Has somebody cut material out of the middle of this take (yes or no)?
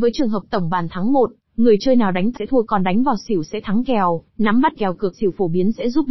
yes